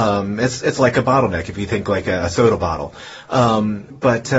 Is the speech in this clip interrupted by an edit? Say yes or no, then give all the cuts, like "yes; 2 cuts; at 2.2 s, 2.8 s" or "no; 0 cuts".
no; 0 cuts